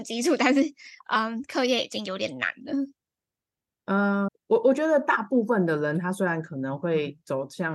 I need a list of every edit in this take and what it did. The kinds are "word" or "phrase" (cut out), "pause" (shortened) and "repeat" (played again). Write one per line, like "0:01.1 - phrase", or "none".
0:04.3 - word